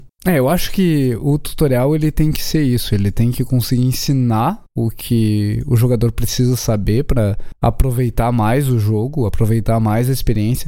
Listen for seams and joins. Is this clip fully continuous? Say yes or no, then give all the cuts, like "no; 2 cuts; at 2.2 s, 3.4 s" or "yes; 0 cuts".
yes; 0 cuts